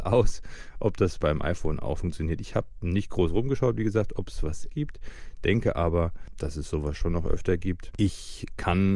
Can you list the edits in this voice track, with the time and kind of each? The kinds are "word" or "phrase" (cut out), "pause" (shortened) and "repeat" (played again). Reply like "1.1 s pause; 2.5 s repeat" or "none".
2.0 s word; 4.7 s word